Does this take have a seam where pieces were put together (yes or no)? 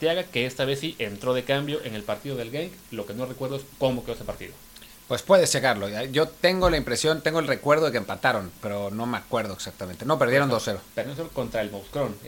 yes